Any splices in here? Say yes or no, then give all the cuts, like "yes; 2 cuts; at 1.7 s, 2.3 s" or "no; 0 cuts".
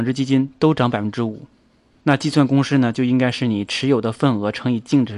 no; 0 cuts